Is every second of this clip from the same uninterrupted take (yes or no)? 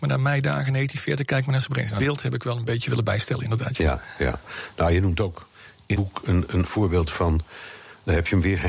no